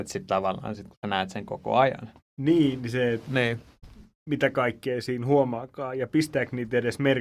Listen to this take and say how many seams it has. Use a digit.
1